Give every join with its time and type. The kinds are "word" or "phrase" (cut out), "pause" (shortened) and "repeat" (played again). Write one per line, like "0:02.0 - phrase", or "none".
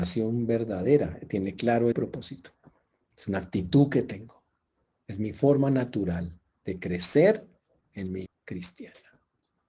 0:01.9 - word
0:08.3 - word